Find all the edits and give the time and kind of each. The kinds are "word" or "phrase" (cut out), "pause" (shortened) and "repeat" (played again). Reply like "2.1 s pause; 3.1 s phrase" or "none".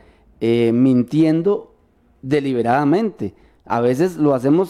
none